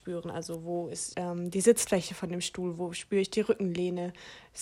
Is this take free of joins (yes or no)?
no